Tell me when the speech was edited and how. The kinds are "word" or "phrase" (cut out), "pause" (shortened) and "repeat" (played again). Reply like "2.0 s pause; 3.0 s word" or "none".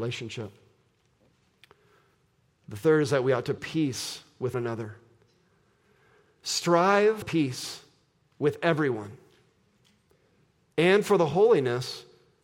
3.6 s word; 4.5 s word; 7.2 s word